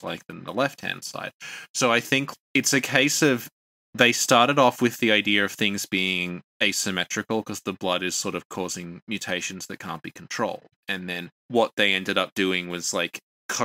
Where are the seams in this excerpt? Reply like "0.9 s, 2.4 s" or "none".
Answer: 2.3 s, 6.5 s, 11.4 s